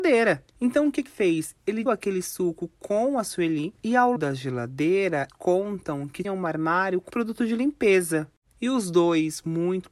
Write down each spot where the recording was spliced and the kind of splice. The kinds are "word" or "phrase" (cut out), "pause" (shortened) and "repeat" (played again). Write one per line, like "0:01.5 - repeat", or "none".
0:01.1 - word
0:01.9 - word
0:04.2 - word
0:05.3 - word
0:06.2 - word
0:07.1 - word